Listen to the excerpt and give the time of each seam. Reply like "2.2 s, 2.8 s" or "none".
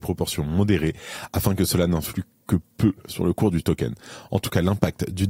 none